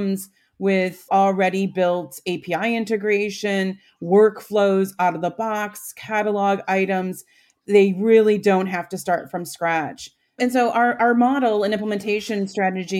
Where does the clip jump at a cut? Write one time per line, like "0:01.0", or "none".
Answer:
none